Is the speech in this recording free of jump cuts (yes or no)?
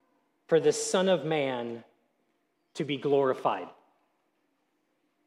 yes